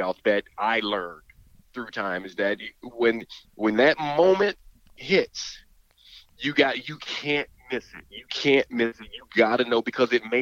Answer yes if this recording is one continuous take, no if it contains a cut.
yes